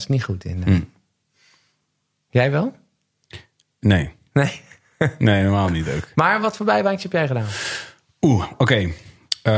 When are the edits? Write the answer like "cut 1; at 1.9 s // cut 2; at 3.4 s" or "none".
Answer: none